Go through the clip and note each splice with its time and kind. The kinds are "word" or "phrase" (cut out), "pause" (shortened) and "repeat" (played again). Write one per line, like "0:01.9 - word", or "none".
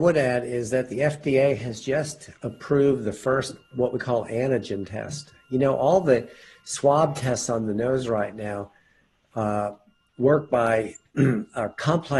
none